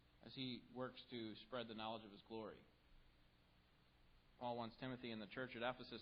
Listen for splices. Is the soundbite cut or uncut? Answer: cut